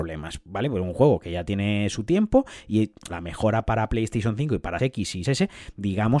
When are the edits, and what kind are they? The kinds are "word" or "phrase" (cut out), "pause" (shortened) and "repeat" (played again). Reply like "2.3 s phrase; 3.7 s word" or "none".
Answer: 3.1 s word; 4.8 s word; 5.2 s word